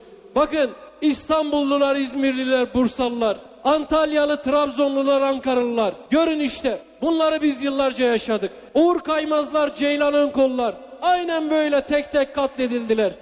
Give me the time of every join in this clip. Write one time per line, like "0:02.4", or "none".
none